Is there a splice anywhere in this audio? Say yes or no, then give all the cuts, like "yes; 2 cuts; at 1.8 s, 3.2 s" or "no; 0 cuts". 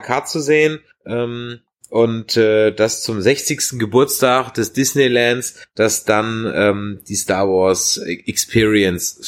no; 0 cuts